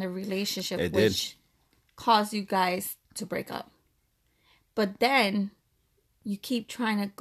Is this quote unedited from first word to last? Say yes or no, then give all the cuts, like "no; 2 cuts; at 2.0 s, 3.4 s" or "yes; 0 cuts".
yes; 0 cuts